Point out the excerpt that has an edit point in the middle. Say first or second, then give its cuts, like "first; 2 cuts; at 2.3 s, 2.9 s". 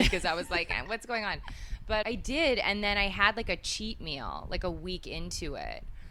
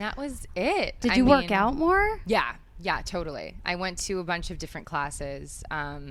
first; 1 cut; at 2.0 s